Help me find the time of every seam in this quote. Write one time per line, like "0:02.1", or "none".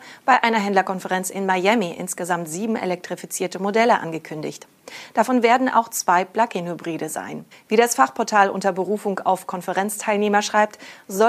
0:07.5